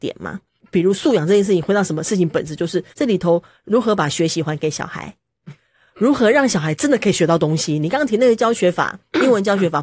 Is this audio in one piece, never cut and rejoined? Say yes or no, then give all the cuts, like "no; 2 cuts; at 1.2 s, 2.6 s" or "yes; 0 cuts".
no; 1 cut; at 2.9 s